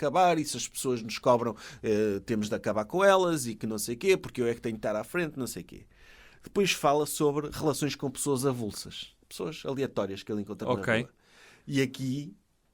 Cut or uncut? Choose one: cut